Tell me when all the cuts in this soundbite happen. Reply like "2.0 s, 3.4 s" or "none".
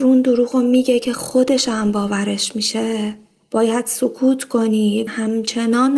5.1 s